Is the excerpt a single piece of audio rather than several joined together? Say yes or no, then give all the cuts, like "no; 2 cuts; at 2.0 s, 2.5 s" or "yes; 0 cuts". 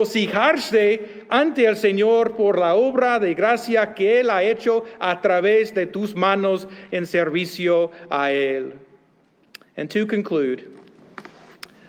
yes; 0 cuts